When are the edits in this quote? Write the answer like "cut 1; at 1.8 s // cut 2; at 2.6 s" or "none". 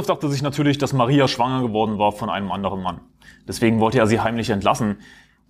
none